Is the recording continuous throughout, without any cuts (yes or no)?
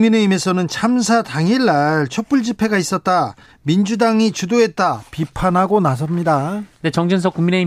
yes